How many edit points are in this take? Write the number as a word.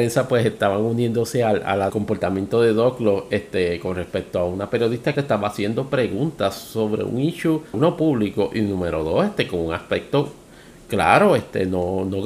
three